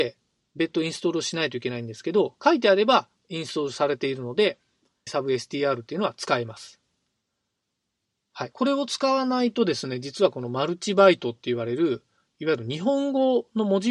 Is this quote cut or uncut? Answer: cut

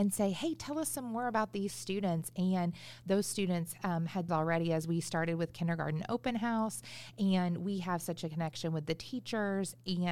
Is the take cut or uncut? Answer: cut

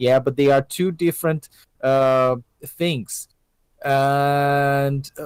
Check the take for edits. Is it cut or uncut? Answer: uncut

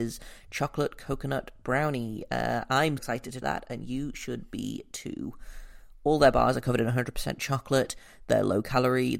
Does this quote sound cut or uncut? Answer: cut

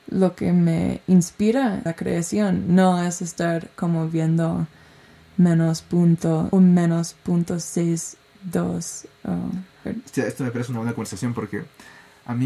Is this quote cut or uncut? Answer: cut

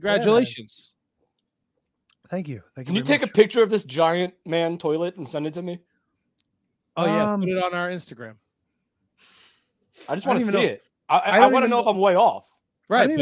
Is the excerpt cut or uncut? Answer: uncut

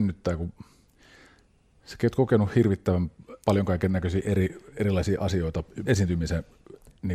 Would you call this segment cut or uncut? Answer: cut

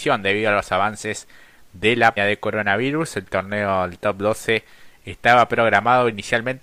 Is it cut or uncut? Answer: cut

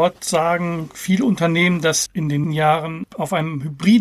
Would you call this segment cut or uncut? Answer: cut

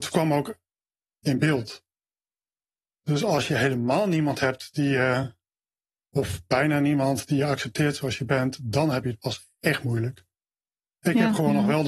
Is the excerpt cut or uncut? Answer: uncut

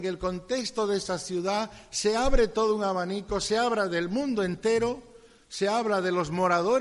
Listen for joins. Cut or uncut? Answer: uncut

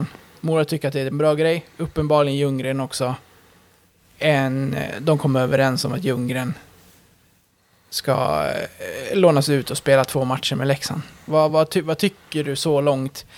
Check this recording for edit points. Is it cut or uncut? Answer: uncut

